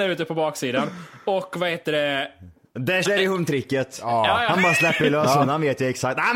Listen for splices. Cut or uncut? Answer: cut